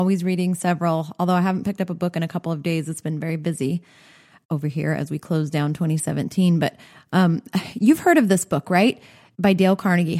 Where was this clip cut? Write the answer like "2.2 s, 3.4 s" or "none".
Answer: none